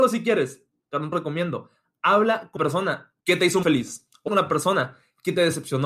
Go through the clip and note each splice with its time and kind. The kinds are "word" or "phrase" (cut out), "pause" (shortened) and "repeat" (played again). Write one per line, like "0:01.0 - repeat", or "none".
0:01.1 - word
0:02.6 - word
0:03.2 - pause
0:03.6 - word
0:04.3 - word